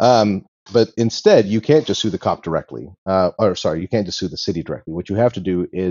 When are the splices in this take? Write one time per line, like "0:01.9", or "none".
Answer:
none